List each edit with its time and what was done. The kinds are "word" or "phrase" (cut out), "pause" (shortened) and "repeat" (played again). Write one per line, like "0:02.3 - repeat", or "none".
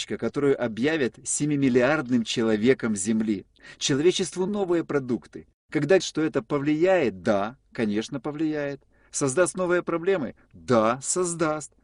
0:04.5 - word
0:06.0 - word